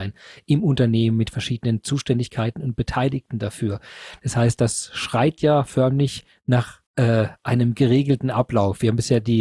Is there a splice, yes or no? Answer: yes